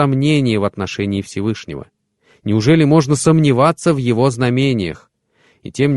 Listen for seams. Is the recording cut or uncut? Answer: uncut